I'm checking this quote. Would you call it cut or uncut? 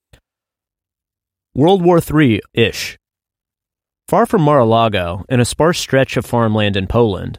cut